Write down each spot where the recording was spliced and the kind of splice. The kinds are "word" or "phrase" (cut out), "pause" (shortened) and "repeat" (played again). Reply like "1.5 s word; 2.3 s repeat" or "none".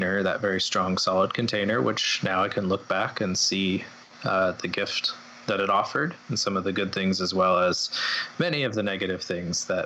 none